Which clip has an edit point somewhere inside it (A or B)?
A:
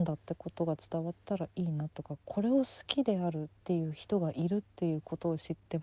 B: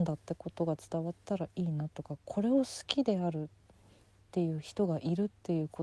A